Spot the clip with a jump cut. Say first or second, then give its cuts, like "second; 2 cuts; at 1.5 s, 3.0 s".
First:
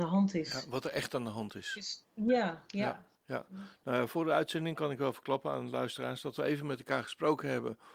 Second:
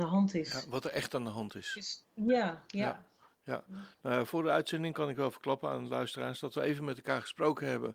first; 1 cut; at 3.1 s